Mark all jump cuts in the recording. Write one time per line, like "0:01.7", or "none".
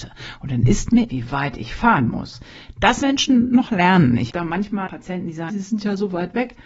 0:01.1
0:03.0
0:04.3
0:04.9
0:05.5